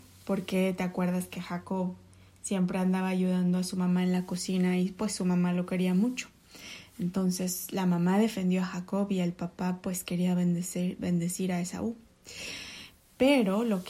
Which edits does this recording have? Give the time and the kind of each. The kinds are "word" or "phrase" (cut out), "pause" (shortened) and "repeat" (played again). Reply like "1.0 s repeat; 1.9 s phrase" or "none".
none